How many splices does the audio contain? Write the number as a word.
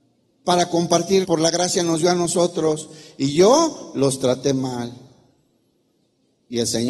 one